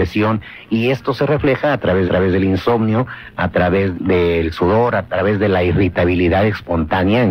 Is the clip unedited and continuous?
no; 2 cuts; at 2.1 s, 3.9 s

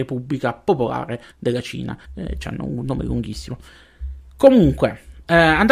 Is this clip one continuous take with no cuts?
no; 2 cuts; at 1.3 s, 2.0 s

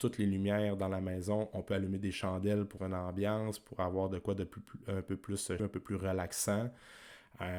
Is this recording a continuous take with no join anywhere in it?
no; 2 cuts; at 2.8 s, 5.6 s

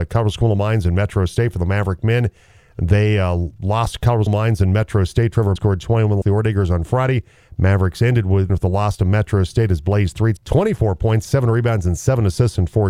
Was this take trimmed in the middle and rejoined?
yes; 6 cuts; at 4.3 s, 5.6 s, 6.2 s, 8.5 s, 10.4 s, 11.2 s

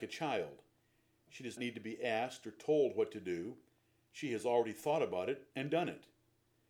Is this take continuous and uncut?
no; 1 cut; at 1.6 s

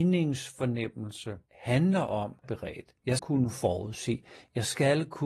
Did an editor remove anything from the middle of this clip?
yes; 3 cuts; at 1.5 s, 2.4 s, 3.2 s

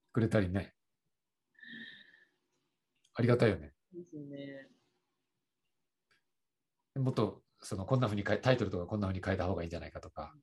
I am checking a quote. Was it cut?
no; 0 cuts

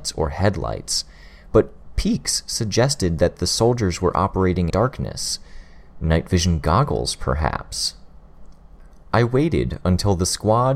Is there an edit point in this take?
yes; 1 cut; at 4.7 s

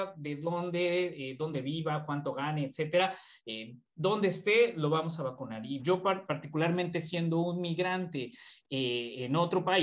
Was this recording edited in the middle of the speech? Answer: yes; 1 cut; at 5.8 s

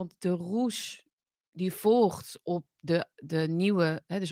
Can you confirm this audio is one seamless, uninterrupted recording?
yes; 0 cuts

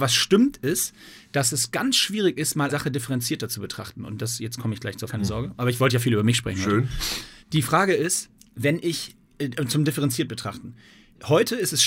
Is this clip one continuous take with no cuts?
no; 4 cuts; at 2.7 s, 5.1 s, 7.4 s, 8.4 s

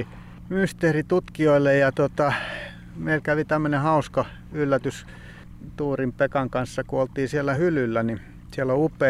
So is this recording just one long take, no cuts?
yes; 0 cuts

